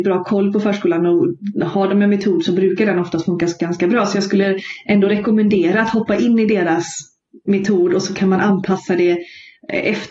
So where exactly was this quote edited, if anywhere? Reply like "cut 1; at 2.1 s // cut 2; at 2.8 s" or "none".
none

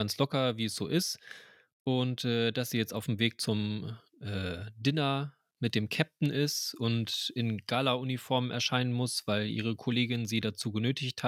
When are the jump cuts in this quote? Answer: none

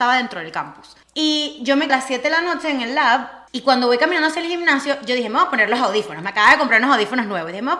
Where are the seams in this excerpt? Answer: cut 1; at 1.0 s // cut 2; at 1.9 s // cut 3; at 3.5 s

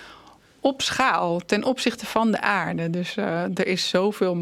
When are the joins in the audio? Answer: none

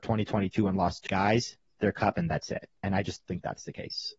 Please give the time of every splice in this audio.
cut 1; at 1.1 s // cut 2; at 1.8 s // cut 3; at 3.3 s

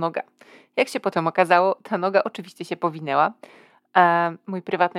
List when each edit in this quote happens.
none

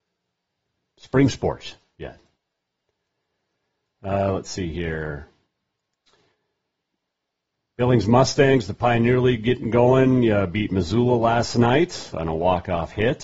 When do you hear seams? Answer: none

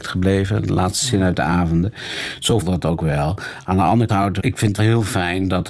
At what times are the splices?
cut 1; at 2.6 s // cut 2; at 4.1 s // cut 3; at 4.4 s // cut 4; at 4.8 s

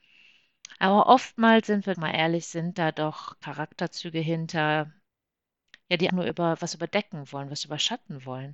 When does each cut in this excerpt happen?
cut 1; at 1.9 s // cut 2; at 6.1 s

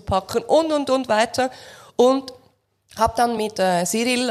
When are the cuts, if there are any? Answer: none

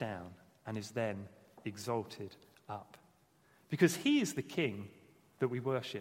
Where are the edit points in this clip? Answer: none

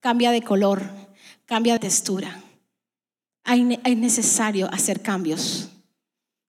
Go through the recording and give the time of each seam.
cut 1; at 1.8 s

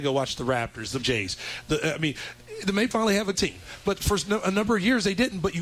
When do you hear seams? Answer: cut 1; at 1.0 s // cut 2; at 2.9 s // cut 3; at 3.3 s

